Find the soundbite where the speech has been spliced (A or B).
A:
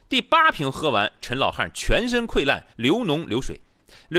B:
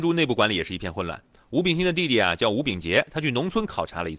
A